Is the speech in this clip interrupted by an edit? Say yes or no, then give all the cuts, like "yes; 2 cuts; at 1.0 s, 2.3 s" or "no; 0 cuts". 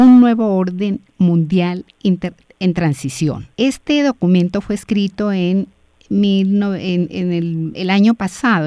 yes; 2 cuts; at 3.5 s, 7.7 s